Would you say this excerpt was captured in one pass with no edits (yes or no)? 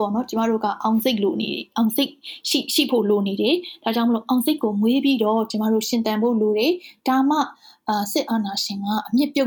yes